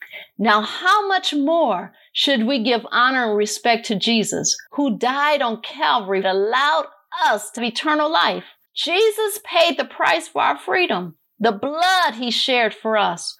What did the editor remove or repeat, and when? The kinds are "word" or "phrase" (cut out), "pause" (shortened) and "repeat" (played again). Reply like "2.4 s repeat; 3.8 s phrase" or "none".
4.7 s pause; 6.2 s phrase; 7.6 s word; 8.7 s pause